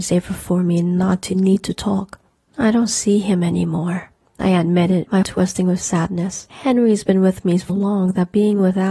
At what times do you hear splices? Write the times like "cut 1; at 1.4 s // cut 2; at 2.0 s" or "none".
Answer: cut 1; at 5.2 s // cut 2; at 7.7 s